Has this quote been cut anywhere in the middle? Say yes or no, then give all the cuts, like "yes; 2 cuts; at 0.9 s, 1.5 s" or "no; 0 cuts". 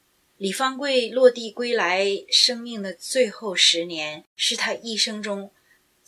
yes; 1 cut; at 4.3 s